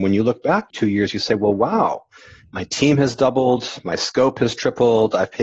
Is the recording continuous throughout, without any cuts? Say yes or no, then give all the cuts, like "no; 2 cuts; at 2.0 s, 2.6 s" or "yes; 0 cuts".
yes; 0 cuts